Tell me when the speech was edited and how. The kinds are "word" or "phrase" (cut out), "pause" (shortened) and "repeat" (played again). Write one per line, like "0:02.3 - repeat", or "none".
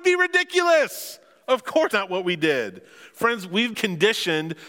0:01.9 - word
0:03.7 - word